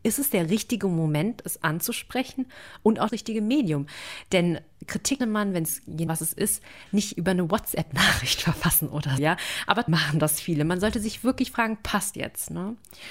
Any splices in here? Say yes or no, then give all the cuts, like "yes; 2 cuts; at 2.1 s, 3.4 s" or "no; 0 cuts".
yes; 6 cuts; at 3.1 s, 5.2 s, 6.1 s, 9.2 s, 9.9 s, 12.1 s